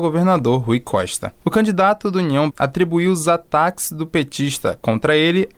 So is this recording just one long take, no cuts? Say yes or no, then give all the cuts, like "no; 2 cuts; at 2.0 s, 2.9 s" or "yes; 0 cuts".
no; 2 cuts; at 1.4 s, 2.5 s